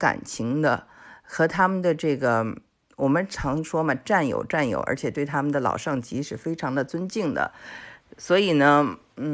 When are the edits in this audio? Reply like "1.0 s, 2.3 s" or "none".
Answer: none